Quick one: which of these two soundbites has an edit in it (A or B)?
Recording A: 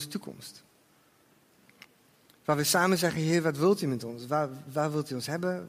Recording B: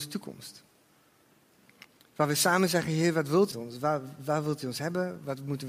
B